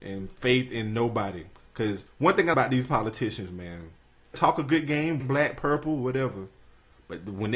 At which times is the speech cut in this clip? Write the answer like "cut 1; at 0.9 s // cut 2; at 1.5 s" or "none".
cut 1; at 2.1 s // cut 2; at 2.5 s // cut 3; at 4.3 s // cut 4; at 5.2 s